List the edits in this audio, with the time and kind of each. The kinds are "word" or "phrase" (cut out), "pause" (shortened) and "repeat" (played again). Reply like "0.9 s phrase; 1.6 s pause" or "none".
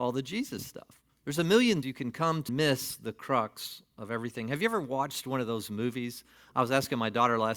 1.1 s pause; 1.8 s word; 2.5 s phrase